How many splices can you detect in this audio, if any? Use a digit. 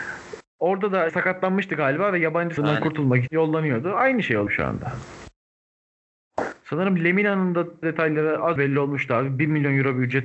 6